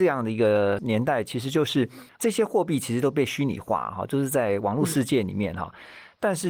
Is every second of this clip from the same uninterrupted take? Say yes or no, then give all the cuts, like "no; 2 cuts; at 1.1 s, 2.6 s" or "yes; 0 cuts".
yes; 0 cuts